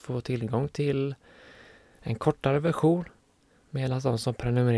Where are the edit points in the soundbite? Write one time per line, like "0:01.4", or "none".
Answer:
none